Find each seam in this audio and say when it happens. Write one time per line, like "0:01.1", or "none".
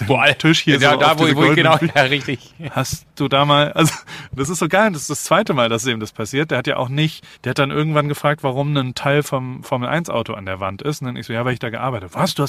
0:07.3

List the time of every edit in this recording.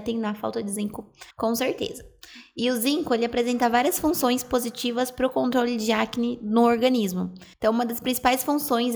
0:01.3
0:07.5

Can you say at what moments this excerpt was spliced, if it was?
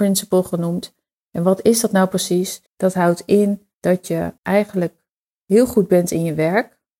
0:02.7
0:03.7
0:04.4

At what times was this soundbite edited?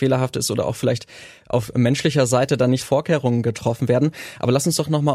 0:02.8

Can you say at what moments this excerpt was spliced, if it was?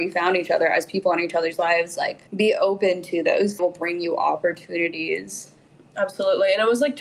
0:02.3
0:03.6

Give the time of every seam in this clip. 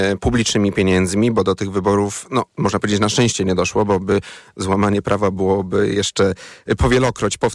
none

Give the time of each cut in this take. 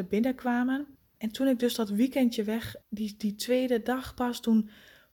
0:01.0
0:02.8

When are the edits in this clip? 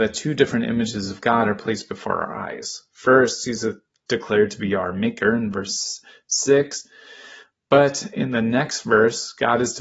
none

